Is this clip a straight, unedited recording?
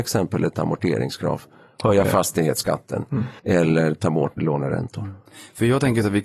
no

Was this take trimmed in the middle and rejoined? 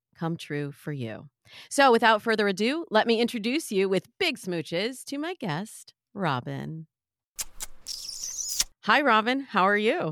no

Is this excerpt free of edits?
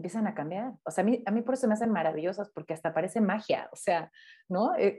yes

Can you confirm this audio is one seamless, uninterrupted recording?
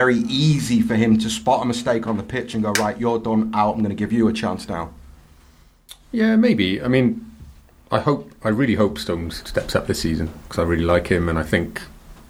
yes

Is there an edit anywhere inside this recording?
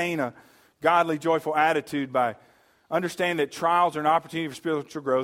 no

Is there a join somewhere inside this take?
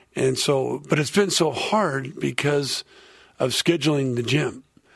no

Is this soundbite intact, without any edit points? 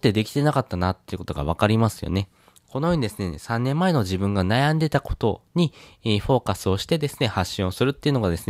yes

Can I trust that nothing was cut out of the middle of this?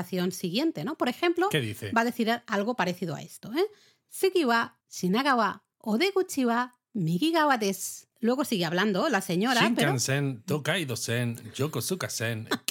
no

